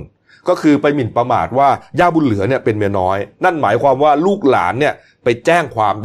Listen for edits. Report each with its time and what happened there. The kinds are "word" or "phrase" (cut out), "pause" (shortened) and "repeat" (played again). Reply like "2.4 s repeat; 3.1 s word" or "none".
none